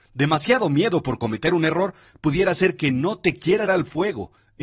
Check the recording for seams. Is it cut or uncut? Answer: cut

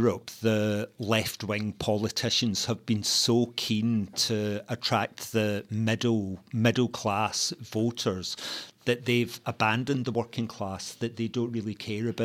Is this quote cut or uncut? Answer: uncut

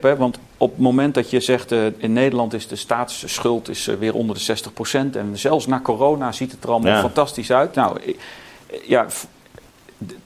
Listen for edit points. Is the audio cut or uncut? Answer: uncut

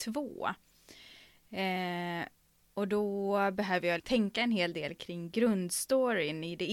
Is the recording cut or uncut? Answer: cut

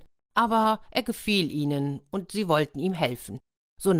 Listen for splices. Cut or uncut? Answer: uncut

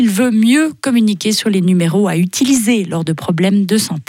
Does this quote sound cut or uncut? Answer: uncut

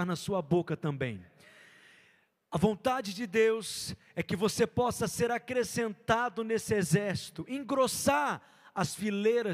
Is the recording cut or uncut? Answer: uncut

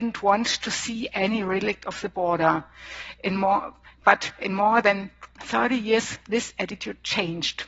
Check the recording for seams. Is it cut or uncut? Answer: uncut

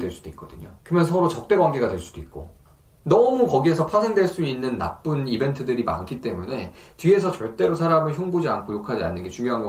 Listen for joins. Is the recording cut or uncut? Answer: uncut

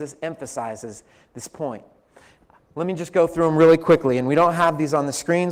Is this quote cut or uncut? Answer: uncut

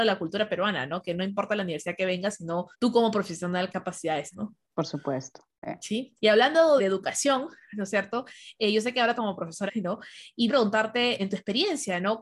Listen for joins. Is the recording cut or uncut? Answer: cut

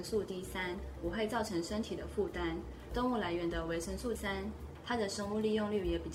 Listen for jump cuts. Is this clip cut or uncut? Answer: cut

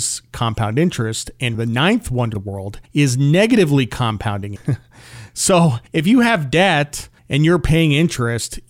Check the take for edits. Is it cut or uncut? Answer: cut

